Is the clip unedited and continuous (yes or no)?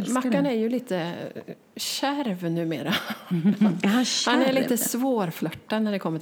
yes